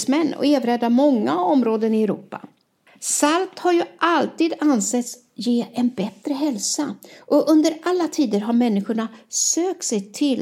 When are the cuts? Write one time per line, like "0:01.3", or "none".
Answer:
0:02.9